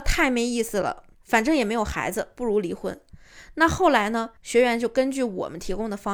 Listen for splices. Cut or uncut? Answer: cut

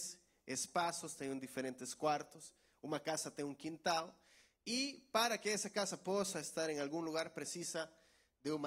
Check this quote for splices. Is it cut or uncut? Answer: uncut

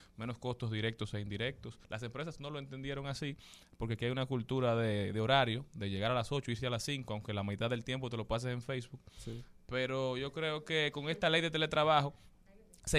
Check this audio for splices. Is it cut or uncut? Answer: cut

